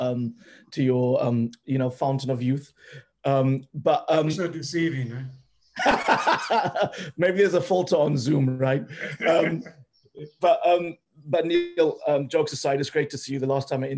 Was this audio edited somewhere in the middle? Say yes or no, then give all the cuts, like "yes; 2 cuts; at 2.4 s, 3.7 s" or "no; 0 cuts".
no; 0 cuts